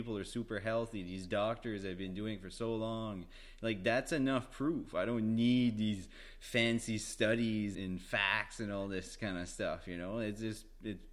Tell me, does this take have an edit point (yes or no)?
yes